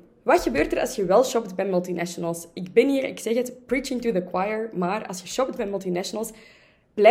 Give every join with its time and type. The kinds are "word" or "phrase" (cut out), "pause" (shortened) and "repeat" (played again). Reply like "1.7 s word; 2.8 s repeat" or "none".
none

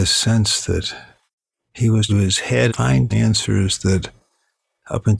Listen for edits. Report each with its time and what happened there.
1.3 s pause; 2.1 s phrase; 2.7 s word; 3.1 s word

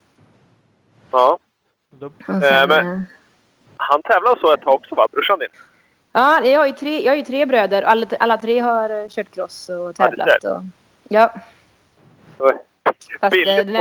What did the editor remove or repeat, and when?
none

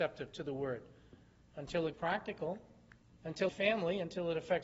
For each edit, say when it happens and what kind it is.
1.9 s word; 3.5 s phrase

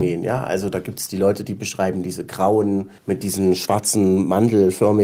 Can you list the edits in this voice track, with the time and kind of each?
3.0 s pause

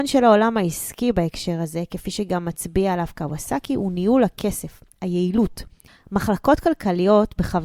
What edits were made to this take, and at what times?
none

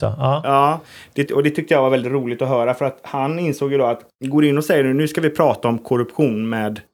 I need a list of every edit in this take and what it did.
1.3 s word

